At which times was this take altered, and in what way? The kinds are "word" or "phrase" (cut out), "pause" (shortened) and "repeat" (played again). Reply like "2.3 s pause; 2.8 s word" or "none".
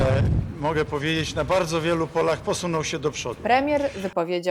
none